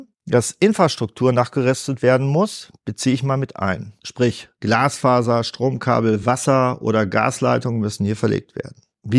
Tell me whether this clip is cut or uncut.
uncut